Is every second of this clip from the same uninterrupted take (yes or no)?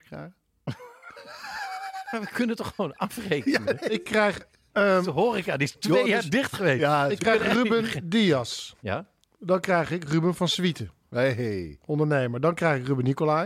yes